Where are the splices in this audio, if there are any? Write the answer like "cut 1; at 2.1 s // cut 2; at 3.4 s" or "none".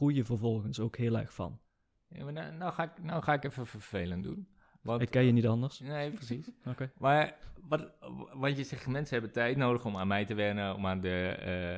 none